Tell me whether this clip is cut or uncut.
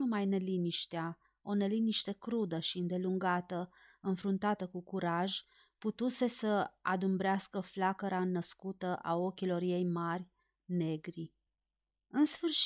uncut